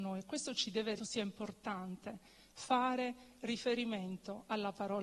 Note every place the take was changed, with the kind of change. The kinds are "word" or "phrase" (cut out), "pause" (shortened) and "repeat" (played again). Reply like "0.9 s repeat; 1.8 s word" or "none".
1.0 s phrase